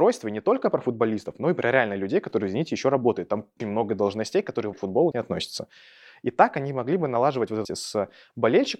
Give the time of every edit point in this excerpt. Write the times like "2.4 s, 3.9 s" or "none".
3.6 s, 4.7 s, 5.1 s, 7.6 s

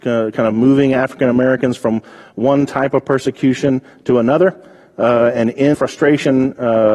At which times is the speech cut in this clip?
5.7 s

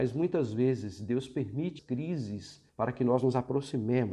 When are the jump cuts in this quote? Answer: 1.8 s, 2.7 s

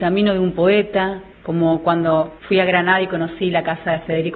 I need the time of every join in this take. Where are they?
1.3 s, 2.4 s

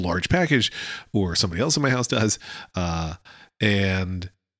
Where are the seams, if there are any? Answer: none

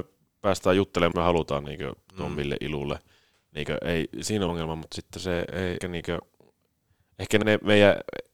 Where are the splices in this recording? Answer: 1.1 s, 4.5 s, 5.8 s, 7.4 s

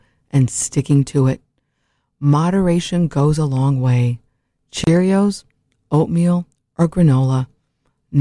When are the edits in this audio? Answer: none

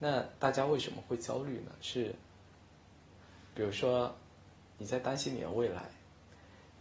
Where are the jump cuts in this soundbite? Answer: none

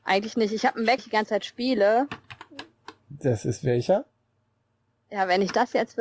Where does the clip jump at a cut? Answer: 1.0 s, 3.0 s

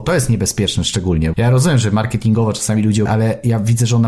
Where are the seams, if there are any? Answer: 1.3 s, 3.1 s

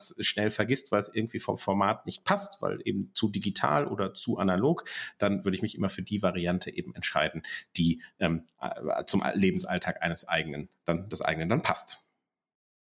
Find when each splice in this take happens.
none

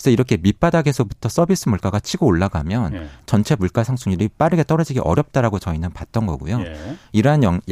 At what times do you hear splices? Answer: none

